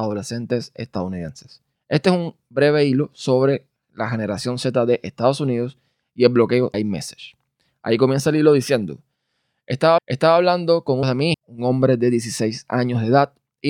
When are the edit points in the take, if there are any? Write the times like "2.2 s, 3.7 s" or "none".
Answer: 6.7 s, 10.0 s, 11.0 s, 11.3 s